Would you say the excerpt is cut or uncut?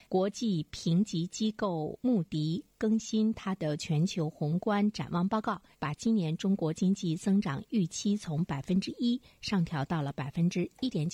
cut